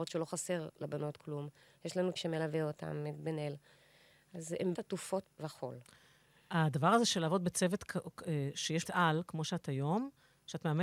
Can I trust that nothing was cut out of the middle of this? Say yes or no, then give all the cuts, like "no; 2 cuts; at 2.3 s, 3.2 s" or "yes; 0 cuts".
no; 4 cuts; at 2.2 s, 4.7 s, 5.2 s, 8.8 s